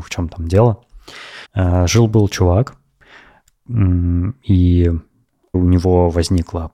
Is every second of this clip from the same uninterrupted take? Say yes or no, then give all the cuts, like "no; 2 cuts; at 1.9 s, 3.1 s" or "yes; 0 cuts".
no; 2 cuts; at 1.4 s, 5.5 s